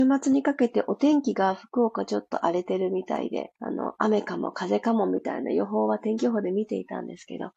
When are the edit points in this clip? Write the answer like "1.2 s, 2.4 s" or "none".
3.6 s